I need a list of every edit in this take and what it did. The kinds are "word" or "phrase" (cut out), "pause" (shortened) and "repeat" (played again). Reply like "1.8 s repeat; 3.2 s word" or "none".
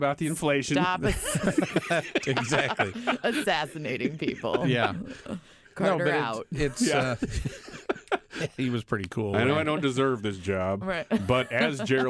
none